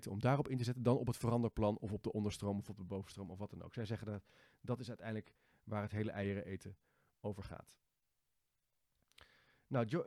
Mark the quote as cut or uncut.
uncut